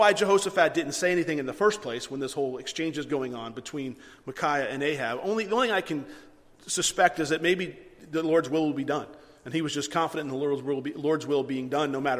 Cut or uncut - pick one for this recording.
uncut